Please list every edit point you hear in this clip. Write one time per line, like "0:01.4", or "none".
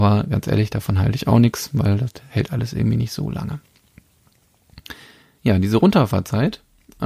none